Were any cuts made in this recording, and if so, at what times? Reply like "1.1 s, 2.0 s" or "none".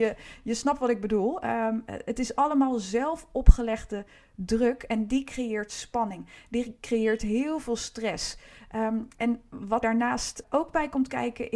9.8 s, 10.4 s